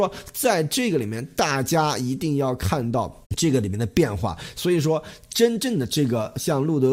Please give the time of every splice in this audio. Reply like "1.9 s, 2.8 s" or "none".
3.2 s